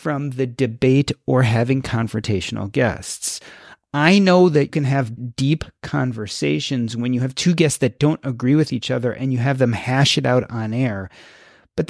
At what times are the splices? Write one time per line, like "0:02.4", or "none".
0:04.7
0:05.2